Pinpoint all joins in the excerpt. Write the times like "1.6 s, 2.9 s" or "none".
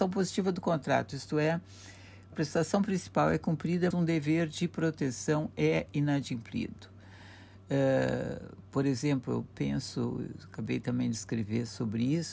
2.3 s, 3.9 s, 8.7 s